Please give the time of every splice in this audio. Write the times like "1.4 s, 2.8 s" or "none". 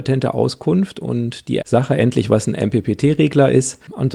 1.6 s, 2.3 s